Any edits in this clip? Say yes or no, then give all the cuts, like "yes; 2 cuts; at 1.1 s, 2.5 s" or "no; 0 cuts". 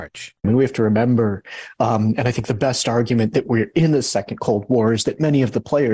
no; 0 cuts